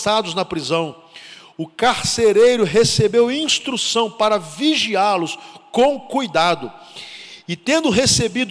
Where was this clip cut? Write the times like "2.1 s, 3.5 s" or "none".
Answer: none